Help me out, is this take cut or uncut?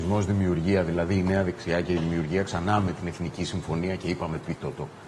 uncut